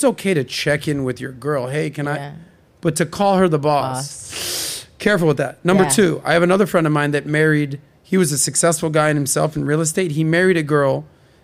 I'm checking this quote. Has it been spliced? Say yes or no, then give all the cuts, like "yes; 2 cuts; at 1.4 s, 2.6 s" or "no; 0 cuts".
no; 0 cuts